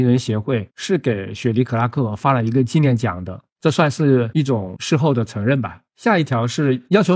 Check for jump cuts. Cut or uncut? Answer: cut